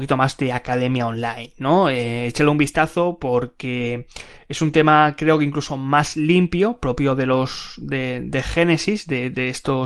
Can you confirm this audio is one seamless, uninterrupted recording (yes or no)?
yes